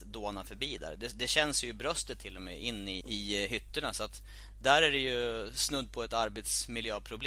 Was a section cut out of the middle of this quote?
yes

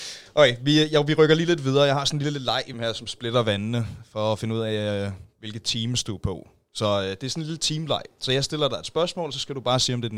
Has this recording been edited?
yes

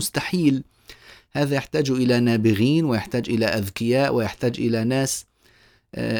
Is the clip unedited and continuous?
yes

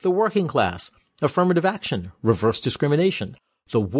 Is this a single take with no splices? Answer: yes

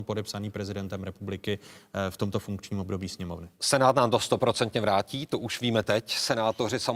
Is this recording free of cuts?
yes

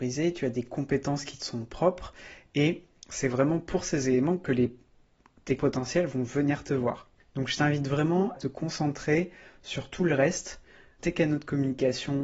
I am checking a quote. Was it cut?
yes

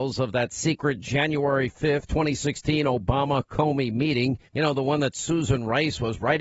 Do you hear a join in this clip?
yes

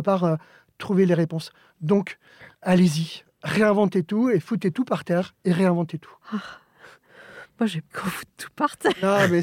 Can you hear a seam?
yes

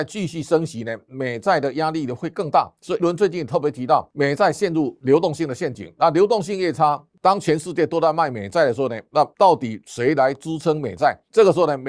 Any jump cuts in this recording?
yes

